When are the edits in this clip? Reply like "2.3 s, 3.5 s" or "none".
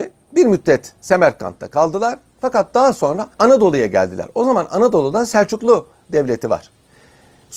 3.3 s